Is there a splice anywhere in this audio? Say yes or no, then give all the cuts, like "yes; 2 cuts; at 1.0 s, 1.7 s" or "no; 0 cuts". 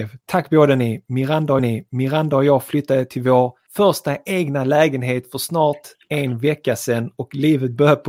yes; 2 cuts; at 1.6 s, 3.7 s